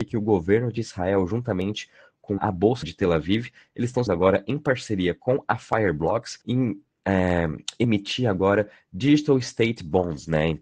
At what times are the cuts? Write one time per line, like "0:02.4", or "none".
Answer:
0:02.4
0:02.8
0:04.1
0:06.4